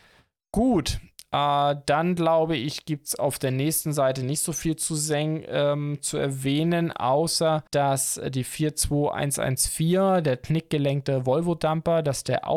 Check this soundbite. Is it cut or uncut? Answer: cut